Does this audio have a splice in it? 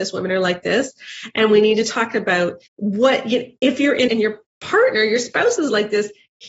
yes; 2 cuts; at 2.7 s, 4.1 s

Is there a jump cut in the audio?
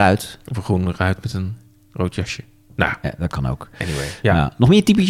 no; 0 cuts

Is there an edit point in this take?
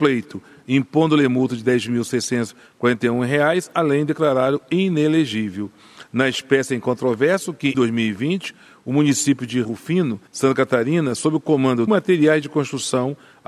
yes; 4 cuts; at 7.7 s, 9.6 s, 10.3 s, 11.9 s

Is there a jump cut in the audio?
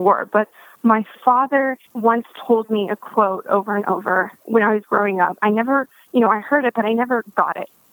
yes; 2 cuts; at 1.8 s, 4.4 s

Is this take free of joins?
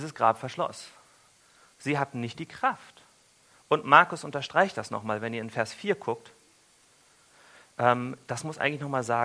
yes; 0 cuts

